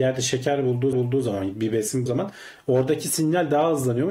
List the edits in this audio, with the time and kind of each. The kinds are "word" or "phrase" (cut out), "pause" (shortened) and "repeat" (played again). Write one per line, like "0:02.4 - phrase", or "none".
0:00.9 - repeat
0:02.1 - word